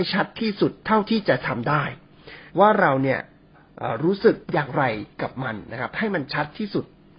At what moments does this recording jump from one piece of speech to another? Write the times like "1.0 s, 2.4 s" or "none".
2.5 s, 4.4 s